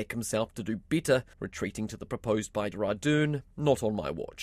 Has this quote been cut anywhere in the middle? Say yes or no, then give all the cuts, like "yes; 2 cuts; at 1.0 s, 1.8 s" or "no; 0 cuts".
yes; 4 cuts; at 1.3 s, 2.1 s, 2.7 s, 3.5 s